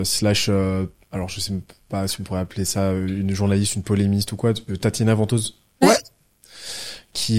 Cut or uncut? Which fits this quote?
uncut